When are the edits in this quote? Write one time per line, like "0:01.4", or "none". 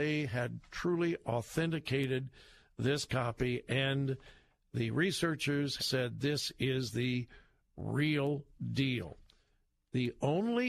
0:05.8